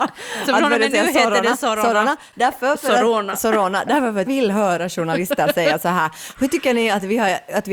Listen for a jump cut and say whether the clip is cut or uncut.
cut